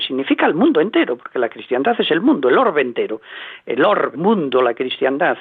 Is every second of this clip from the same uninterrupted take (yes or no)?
no